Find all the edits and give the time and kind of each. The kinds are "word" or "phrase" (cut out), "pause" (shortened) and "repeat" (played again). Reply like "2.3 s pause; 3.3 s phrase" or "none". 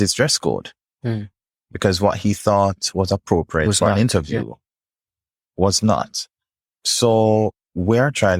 none